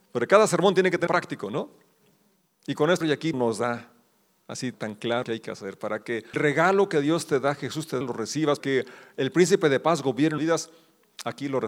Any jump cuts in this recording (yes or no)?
yes